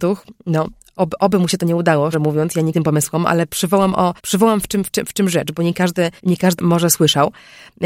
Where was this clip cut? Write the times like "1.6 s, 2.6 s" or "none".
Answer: 2.1 s, 2.7 s, 4.2 s, 6.2 s, 6.6 s